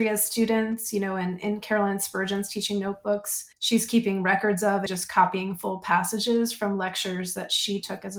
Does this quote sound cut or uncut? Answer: cut